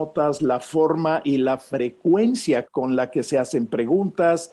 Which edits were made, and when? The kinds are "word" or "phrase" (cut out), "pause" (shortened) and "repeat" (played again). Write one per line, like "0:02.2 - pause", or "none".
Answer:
none